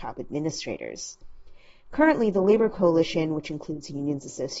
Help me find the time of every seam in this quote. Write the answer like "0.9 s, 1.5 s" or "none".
none